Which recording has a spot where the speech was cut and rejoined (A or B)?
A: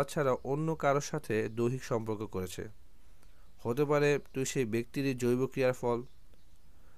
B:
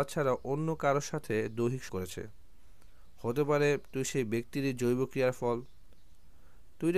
B